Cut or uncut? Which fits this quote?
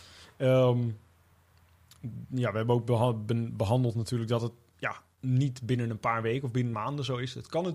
cut